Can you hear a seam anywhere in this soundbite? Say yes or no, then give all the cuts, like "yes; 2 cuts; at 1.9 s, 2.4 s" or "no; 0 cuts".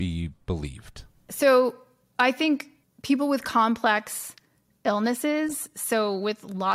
no; 0 cuts